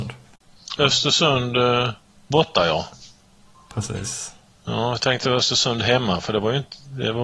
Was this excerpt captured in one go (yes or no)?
yes